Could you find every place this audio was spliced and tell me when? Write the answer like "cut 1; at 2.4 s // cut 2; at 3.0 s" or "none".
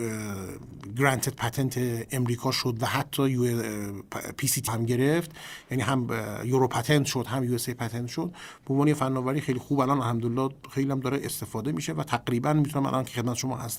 cut 1; at 4.7 s